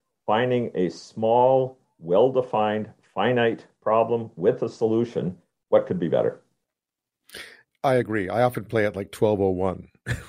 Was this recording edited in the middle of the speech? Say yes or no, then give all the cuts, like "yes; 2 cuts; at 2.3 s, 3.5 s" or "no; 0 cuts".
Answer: no; 0 cuts